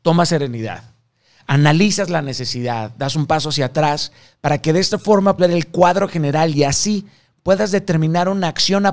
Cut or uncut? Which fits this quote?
cut